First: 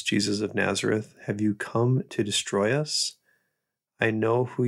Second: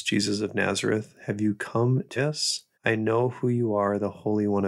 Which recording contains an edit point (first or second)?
second